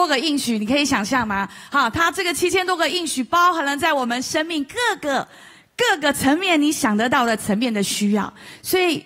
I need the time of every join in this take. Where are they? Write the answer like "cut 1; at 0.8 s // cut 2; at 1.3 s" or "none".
none